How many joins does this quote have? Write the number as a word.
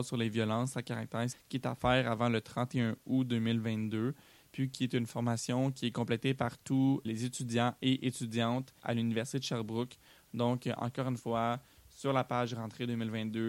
three